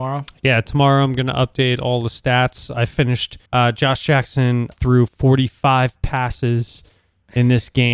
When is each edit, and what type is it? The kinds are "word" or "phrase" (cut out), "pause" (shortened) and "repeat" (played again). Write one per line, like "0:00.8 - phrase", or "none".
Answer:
0:03.5 - pause
0:04.7 - word